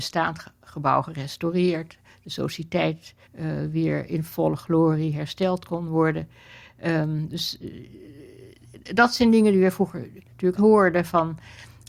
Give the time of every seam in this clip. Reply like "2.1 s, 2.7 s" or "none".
3.2 s, 10.6 s